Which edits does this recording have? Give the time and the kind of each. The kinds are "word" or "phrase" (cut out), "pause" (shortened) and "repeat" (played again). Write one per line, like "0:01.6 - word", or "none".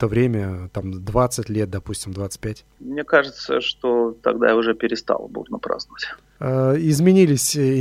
none